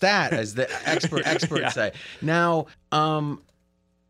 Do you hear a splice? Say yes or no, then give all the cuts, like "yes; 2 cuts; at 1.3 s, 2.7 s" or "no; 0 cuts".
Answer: yes; 2 cuts; at 1.2 s, 2.7 s